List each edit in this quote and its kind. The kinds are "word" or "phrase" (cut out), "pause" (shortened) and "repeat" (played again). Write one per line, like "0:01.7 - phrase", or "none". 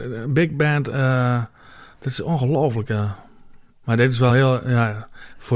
none